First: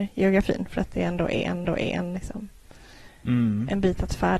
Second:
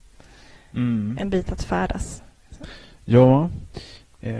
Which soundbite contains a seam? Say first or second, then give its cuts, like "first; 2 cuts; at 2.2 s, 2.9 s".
first; 1 cut; at 1.6 s